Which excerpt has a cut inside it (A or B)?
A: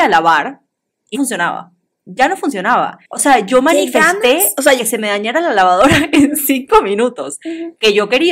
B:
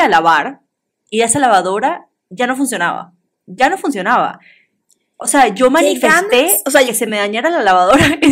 A